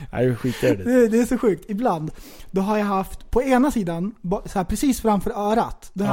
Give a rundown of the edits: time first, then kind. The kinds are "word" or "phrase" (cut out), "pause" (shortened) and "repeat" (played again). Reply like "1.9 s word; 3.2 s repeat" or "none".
none